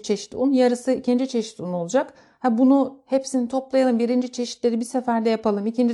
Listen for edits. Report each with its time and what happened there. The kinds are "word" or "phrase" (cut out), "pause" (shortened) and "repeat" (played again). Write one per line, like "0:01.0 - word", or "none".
none

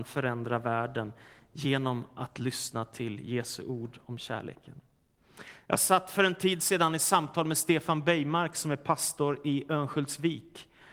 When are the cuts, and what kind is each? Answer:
none

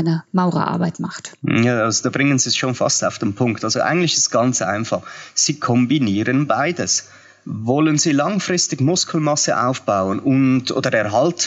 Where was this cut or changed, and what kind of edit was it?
none

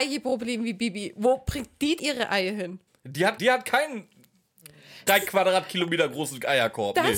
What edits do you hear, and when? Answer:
0:02.0 - word
0:02.9 - pause
0:03.4 - word
0:05.1 - word

